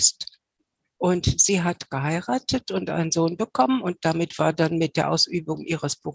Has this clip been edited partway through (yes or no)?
no